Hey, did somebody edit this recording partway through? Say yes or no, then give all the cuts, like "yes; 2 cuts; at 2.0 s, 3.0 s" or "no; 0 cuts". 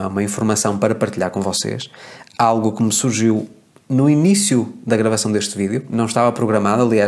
no; 0 cuts